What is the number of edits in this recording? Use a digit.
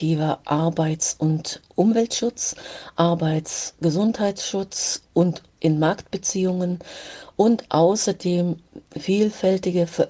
1